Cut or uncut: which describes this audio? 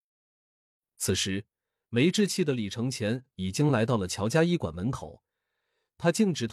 uncut